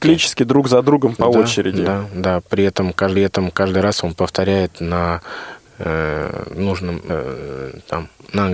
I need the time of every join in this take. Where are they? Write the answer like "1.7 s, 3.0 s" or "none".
3.2 s, 7.1 s